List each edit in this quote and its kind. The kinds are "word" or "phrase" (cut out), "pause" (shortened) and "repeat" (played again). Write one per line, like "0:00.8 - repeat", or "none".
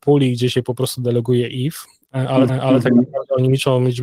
0:02.5 - repeat